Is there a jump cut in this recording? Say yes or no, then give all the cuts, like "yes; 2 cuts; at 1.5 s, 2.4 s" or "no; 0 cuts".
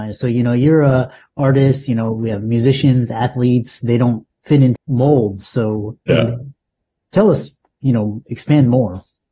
yes; 2 cuts; at 4.8 s, 6.0 s